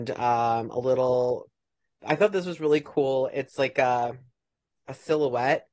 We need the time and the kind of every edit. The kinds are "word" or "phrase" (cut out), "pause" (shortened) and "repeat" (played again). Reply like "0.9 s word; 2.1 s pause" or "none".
none